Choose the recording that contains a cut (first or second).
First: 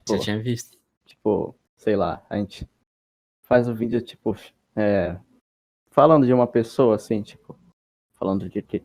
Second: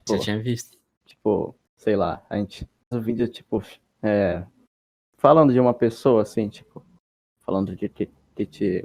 second